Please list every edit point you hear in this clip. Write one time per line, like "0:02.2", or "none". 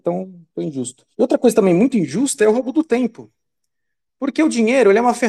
0:01.1